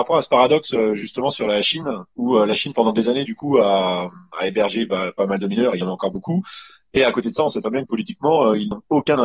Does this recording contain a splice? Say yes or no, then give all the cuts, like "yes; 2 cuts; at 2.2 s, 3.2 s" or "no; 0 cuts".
no; 0 cuts